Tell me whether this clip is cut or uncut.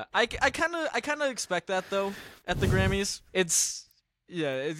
cut